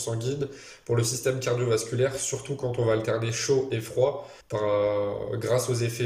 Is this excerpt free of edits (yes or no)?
no